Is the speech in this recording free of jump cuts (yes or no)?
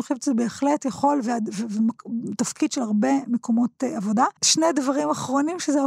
no